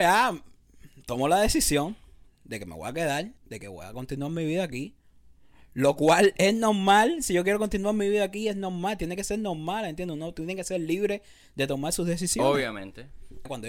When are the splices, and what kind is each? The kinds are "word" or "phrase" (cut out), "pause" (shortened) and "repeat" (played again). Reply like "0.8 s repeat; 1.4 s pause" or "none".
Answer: 3.4 s pause